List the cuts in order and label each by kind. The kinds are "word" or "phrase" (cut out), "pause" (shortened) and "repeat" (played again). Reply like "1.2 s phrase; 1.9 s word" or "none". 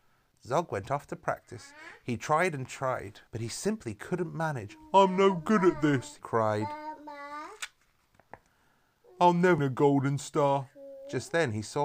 3.3 s pause; 6.2 s word; 9.6 s word